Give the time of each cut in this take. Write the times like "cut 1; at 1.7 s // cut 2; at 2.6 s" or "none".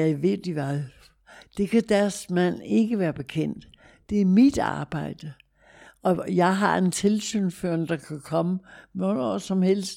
none